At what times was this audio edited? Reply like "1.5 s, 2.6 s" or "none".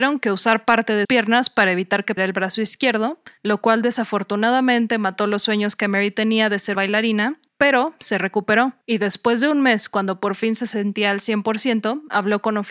1.0 s, 2.2 s, 3.4 s, 6.7 s, 7.5 s, 8.8 s